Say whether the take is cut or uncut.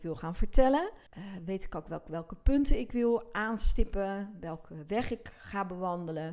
cut